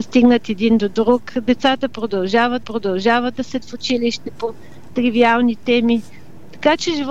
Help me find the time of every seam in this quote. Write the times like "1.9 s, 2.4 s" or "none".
2.6 s, 3.6 s, 4.9 s